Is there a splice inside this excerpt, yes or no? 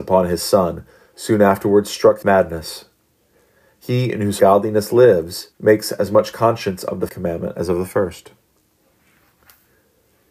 yes